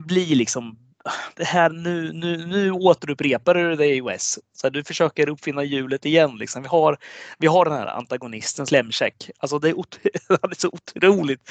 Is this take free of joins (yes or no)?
no